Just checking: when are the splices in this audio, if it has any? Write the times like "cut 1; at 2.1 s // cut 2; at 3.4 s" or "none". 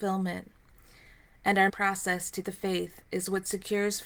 cut 1; at 1.7 s // cut 2; at 2.4 s

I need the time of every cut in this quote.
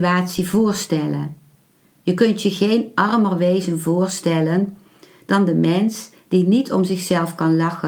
none

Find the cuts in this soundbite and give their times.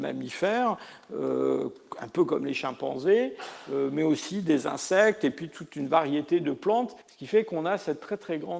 cut 1; at 7.0 s

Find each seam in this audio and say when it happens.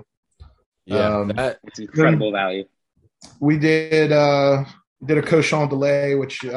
none

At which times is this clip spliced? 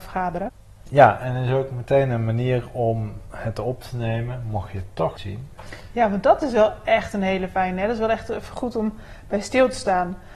cut 1; at 5.2 s

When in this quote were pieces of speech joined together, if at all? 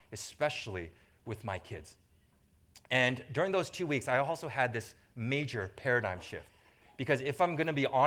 none

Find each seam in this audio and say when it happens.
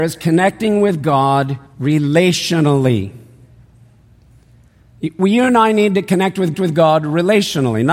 cut 1; at 1.7 s // cut 2; at 6.5 s

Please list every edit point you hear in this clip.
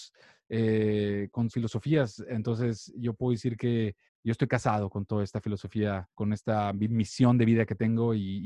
cut 1; at 1.5 s // cut 2; at 4.1 s // cut 3; at 6.1 s

